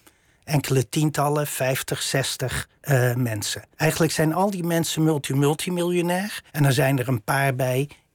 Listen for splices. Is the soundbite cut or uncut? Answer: cut